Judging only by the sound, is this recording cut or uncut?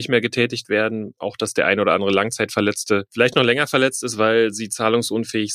uncut